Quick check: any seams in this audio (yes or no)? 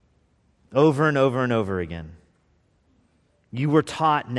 no